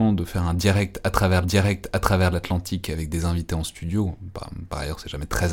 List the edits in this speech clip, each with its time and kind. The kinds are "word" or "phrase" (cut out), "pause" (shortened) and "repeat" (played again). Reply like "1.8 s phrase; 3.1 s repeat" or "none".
1.4 s repeat